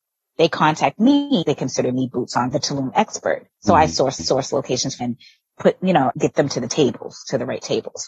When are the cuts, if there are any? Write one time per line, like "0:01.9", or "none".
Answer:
0:01.4
0:02.5
0:03.5
0:04.2
0:05.0
0:06.1